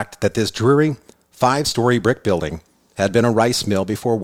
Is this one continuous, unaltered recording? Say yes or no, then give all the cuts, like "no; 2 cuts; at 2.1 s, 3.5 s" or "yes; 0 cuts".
yes; 0 cuts